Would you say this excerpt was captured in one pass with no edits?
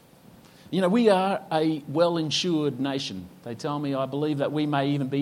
yes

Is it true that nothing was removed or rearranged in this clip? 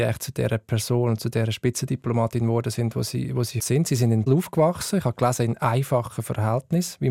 no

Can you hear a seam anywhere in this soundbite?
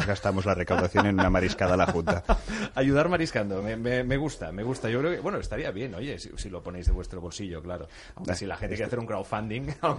no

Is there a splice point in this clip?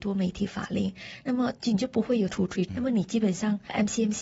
yes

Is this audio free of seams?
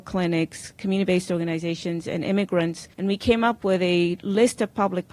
no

